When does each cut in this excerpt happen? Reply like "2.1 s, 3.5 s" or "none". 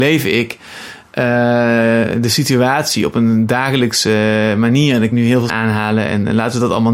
5.1 s, 5.5 s

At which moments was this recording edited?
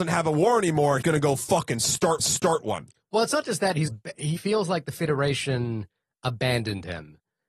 1.0 s, 2.2 s, 3.9 s, 4.4 s

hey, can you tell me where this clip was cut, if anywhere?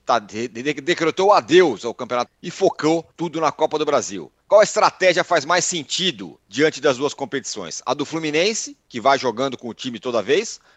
2.3 s, 3.1 s, 4.4 s, 6.4 s

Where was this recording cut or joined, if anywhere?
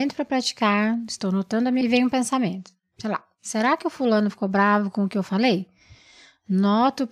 1.8 s

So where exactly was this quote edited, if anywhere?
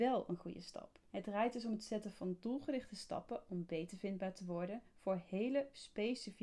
1.1 s

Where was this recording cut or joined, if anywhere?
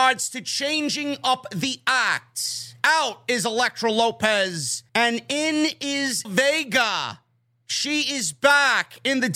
4.9 s, 6.2 s

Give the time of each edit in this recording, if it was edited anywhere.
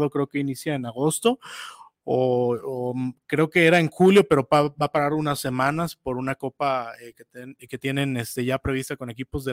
none

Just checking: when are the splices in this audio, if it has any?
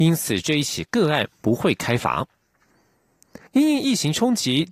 3.5 s

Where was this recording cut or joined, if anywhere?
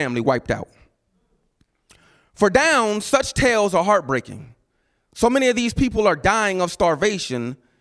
none

